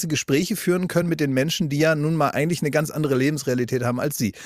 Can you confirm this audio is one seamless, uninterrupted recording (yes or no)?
yes